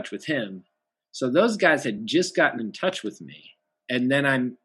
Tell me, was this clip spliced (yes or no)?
no